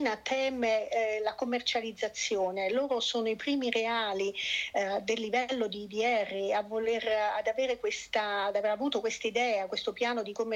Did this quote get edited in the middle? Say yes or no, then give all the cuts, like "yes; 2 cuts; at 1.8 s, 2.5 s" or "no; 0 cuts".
no; 0 cuts